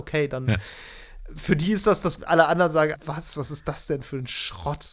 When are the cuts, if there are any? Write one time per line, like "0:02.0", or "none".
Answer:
0:02.2
0:03.0